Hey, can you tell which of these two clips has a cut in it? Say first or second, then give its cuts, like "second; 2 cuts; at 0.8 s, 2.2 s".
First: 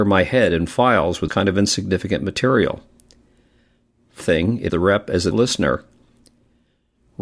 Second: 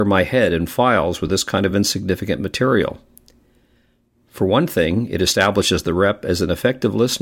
first; 4 cuts; at 1.3 s, 4.2 s, 4.7 s, 5.3 s